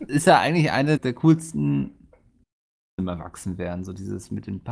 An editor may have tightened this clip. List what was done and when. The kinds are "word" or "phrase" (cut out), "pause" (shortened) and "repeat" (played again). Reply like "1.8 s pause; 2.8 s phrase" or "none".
1.0 s word; 3.0 s word